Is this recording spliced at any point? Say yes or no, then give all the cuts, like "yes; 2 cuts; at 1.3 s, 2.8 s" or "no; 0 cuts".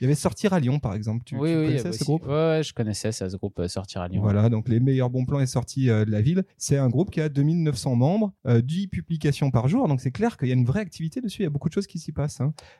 yes; 2 cuts; at 6.5 s, 8.4 s